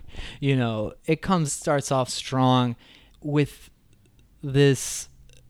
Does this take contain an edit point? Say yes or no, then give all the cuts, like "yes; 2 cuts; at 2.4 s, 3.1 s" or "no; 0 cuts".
yes; 4 cuts; at 1.0 s, 1.5 s, 2.1 s, 3.1 s